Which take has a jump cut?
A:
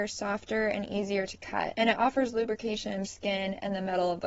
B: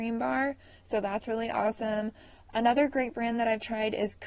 A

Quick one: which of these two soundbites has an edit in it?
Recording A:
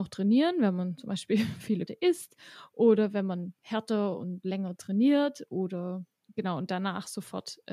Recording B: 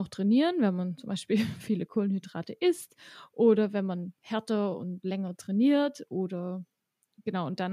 A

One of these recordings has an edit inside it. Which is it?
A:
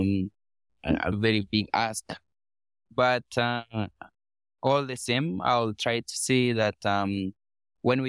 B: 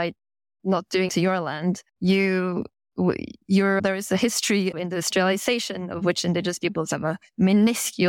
B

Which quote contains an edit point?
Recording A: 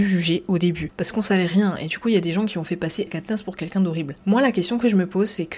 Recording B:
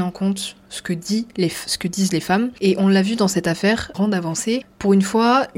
A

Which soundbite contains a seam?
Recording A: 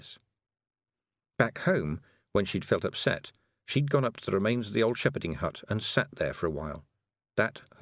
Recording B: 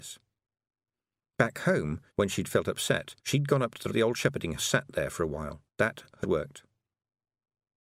B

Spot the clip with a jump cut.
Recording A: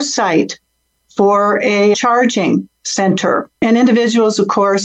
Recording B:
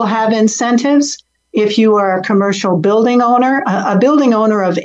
A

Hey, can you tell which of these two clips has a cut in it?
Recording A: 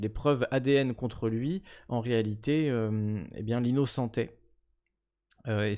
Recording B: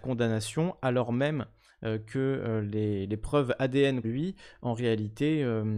B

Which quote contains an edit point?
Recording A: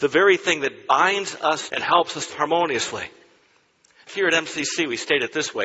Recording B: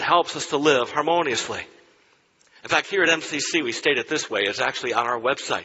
A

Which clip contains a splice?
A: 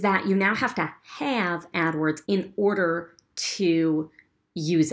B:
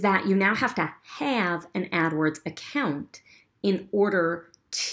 A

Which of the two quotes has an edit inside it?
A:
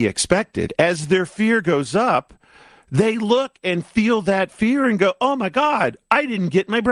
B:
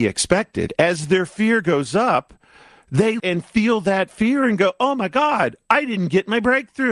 B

